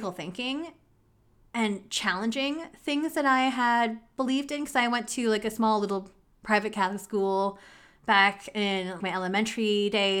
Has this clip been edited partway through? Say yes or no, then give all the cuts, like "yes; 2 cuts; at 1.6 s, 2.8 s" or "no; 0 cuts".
yes; 1 cut; at 9.0 s